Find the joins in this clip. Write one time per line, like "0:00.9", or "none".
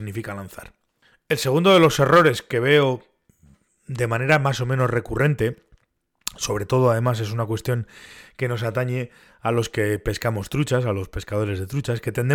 none